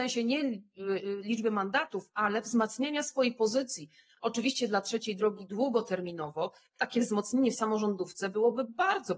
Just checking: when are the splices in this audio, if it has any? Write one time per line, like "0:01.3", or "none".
none